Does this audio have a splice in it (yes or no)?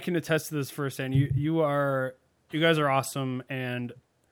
no